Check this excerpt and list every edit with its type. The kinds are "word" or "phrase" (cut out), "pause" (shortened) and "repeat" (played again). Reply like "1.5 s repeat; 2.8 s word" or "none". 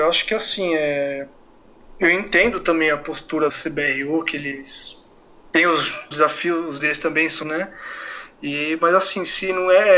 3.5 s word; 6.1 s word; 6.8 s word; 7.4 s word